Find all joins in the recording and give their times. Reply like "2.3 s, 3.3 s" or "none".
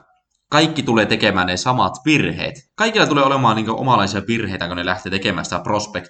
2.7 s